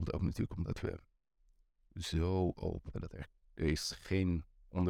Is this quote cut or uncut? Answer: cut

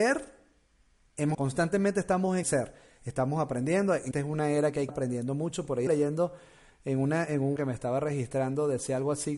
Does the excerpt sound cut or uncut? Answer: cut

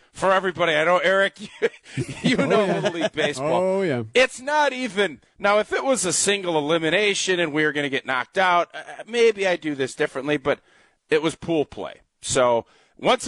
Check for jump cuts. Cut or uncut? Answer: uncut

